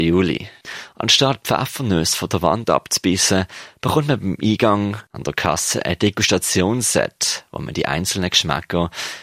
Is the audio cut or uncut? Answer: uncut